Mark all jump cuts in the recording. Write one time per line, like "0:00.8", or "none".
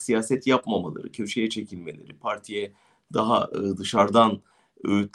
none